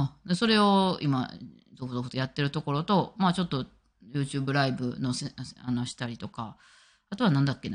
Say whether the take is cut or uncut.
uncut